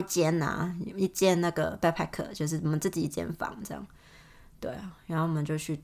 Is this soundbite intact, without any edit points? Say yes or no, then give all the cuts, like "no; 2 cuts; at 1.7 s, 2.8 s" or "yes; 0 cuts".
yes; 0 cuts